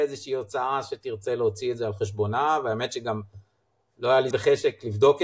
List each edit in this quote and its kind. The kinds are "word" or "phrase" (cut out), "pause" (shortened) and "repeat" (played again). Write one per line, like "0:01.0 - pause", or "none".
0:04.3 - word